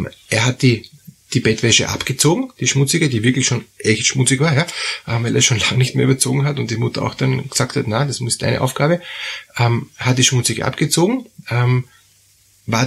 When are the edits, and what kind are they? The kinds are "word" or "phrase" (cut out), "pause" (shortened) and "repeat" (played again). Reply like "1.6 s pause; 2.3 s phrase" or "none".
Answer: none